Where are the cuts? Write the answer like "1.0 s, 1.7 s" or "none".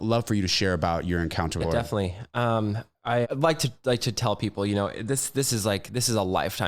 1.6 s, 3.2 s